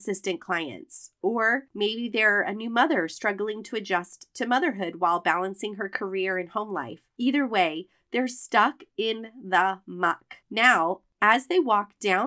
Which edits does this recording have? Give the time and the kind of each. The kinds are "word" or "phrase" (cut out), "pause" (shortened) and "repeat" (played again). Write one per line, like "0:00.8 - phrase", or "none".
0:01.7 - pause
0:07.1 - pause
0:10.4 - pause